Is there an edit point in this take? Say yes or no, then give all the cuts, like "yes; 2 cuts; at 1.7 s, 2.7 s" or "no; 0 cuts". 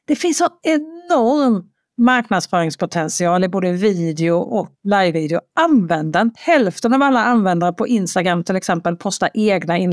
yes; 2 cuts; at 4.7 s, 6.4 s